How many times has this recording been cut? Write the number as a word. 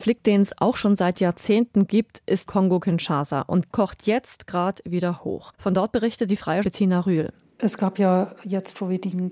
four